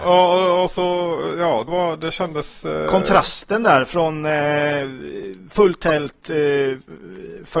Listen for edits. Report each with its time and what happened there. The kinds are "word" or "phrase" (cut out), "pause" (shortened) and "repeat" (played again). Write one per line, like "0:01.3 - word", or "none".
0:01.7 - word